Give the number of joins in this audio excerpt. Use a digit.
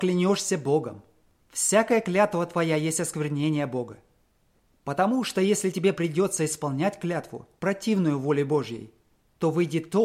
0